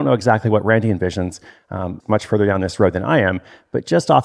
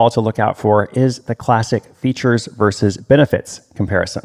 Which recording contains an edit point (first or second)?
first